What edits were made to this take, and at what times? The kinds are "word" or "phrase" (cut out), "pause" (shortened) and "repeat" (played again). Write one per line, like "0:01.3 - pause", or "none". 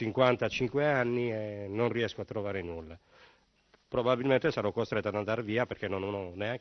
none